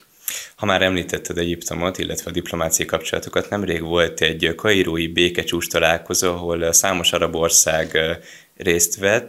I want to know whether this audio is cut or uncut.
uncut